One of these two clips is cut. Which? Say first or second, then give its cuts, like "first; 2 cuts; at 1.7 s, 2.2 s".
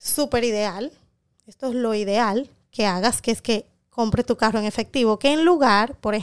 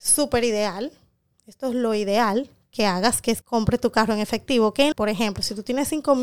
second; 2 cuts; at 3.4 s, 4.9 s